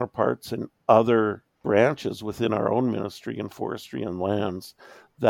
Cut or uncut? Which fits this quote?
cut